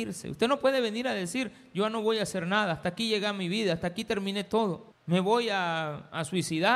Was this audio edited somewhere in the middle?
yes; 1 cut; at 4.9 s

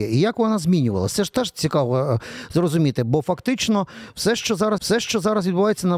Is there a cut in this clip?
yes; 1 cut; at 4.8 s

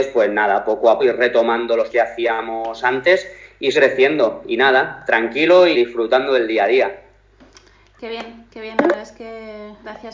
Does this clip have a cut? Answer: yes; 4 cuts; at 1.0 s, 1.9 s, 3.7 s, 5.7 s

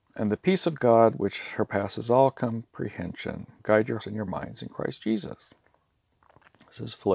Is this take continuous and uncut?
no; 2 cuts; at 3.6 s, 4.0 s

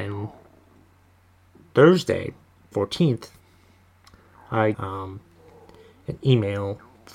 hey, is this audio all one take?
no; 2 cuts; at 2.7 s, 4.7 s

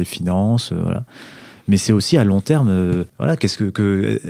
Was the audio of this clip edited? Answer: yes; 1 cut; at 3.1 s

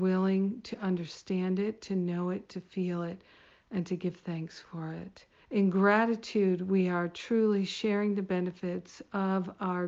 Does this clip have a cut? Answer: yes; 1 cut; at 5.4 s

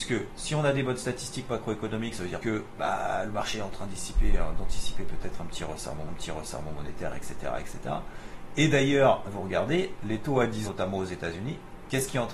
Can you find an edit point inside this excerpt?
yes; 4 cuts; at 2.4 s, 6.1 s, 9.2 s, 10.6 s

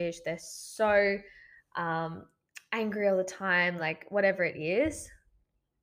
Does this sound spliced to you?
no; 0 cuts

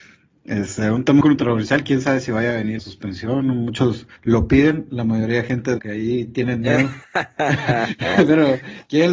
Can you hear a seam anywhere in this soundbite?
yes; 4 cuts; at 1.2 s, 2.8 s, 4.2 s, 5.8 s

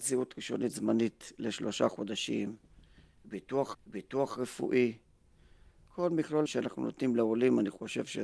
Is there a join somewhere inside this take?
yes; 2 cuts; at 3.7 s, 6.5 s

